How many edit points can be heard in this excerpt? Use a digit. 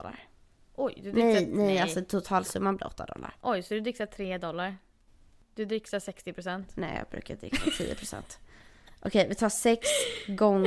0